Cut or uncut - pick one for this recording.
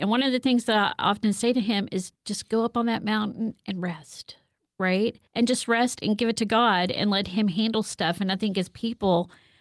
cut